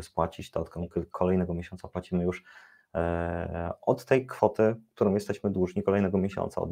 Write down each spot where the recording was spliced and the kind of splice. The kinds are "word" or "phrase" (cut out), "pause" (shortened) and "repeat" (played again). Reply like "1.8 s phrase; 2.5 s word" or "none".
none